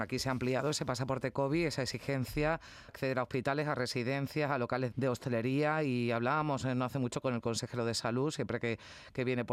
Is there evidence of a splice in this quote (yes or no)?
yes